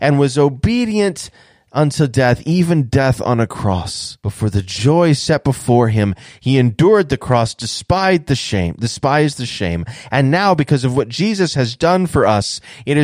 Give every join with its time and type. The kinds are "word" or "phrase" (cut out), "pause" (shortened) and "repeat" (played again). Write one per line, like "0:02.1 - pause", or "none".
0:04.2 - pause